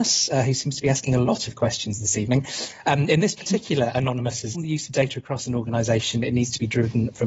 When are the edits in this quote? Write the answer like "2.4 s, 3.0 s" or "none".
4.5 s